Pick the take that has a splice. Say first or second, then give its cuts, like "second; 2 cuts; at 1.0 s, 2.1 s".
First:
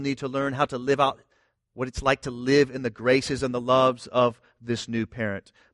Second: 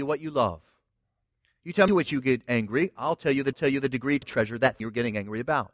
second; 4 cuts; at 1.9 s, 3.5 s, 4.2 s, 4.8 s